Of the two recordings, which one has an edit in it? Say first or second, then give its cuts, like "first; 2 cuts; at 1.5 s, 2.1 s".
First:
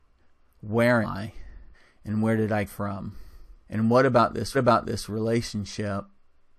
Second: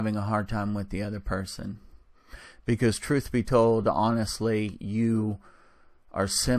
first; 5 cuts; at 1.0 s, 1.7 s, 2.7 s, 3.6 s, 4.5 s